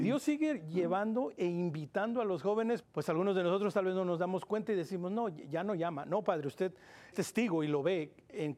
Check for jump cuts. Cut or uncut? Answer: cut